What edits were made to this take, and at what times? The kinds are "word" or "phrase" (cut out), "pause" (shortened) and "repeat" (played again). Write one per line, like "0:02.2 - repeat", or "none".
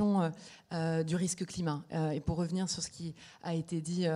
none